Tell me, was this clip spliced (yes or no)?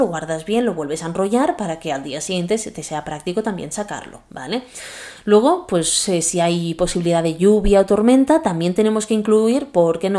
no